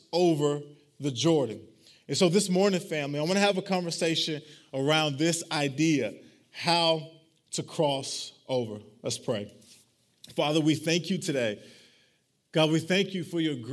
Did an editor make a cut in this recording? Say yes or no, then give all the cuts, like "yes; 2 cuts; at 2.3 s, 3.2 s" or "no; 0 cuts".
no; 0 cuts